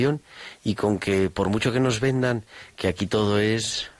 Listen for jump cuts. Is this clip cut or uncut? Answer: uncut